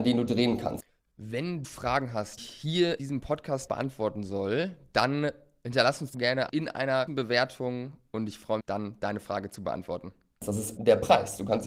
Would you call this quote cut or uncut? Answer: cut